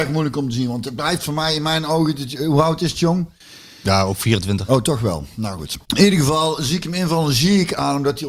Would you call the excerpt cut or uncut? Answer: cut